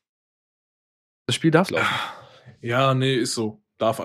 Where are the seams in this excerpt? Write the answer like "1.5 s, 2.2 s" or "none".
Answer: 1.7 s